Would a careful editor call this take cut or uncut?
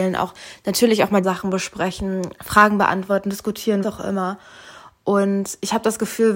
cut